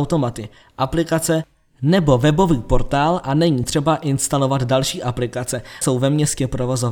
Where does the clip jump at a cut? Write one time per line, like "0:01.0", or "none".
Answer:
0:05.8